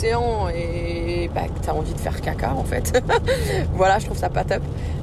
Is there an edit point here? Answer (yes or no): no